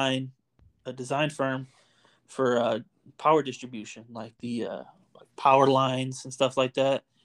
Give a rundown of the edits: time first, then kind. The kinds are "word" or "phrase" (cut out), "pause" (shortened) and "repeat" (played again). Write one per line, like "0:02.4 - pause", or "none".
none